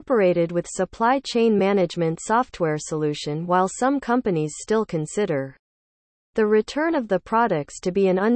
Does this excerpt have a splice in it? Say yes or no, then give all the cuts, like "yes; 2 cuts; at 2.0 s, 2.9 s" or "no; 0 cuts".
no; 0 cuts